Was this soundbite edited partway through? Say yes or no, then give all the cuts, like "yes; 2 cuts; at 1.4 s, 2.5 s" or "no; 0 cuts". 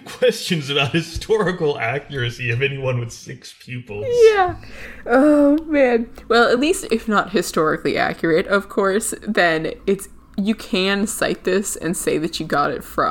no; 0 cuts